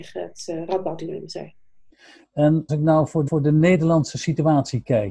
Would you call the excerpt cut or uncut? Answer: cut